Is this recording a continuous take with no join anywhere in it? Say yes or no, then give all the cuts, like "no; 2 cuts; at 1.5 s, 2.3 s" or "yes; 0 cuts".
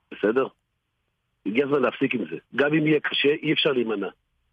no; 1 cut; at 2.5 s